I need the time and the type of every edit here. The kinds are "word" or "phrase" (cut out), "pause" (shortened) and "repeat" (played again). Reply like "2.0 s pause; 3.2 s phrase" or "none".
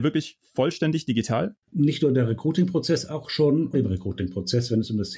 1.6 s pause; 3.7 s word